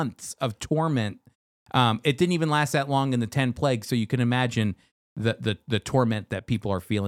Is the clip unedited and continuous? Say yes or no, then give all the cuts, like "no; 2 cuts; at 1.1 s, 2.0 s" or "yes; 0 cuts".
yes; 0 cuts